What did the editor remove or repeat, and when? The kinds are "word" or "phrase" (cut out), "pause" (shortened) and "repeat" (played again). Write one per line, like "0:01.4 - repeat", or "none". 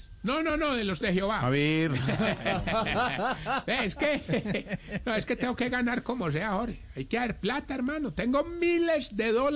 0:01.0 - word